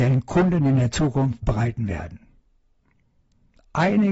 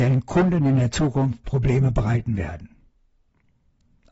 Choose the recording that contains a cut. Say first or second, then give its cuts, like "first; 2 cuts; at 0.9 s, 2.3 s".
first; 1 cut; at 1.4 s